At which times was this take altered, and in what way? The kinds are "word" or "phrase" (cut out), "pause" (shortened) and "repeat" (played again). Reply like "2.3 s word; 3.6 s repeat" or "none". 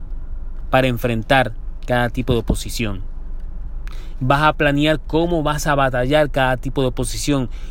none